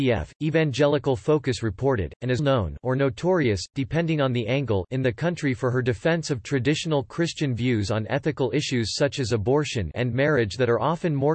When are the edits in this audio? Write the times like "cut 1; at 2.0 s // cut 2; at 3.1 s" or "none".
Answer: cut 1; at 2.4 s // cut 2; at 9.9 s